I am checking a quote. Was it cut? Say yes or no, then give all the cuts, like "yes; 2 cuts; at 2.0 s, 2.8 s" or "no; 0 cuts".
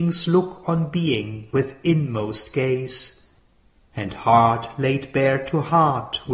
no; 0 cuts